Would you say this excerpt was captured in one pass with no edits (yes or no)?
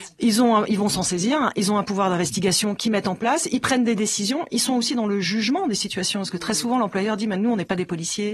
yes